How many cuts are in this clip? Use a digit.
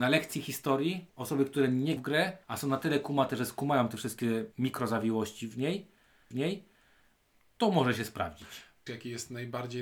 6